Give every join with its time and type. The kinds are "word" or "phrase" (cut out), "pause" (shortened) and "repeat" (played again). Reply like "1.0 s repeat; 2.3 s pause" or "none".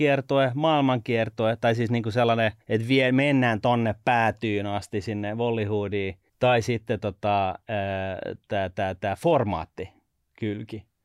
2.6 s pause; 6.3 s pause